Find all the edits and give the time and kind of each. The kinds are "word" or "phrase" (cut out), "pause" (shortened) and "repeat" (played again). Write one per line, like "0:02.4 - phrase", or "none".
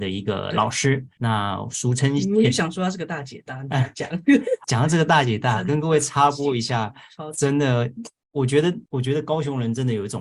0:01.2 - word
0:04.6 - word
0:08.9 - pause